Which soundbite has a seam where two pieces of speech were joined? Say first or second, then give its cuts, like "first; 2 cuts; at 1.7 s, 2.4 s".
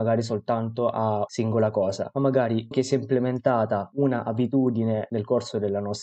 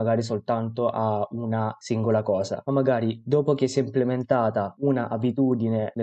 first; 2 cuts; at 1.3 s, 2.7 s